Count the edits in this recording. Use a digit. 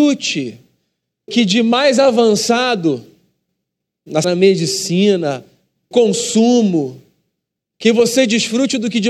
3